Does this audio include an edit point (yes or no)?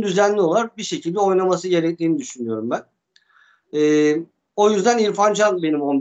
no